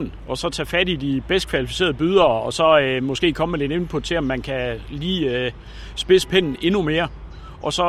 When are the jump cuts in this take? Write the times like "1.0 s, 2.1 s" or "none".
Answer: none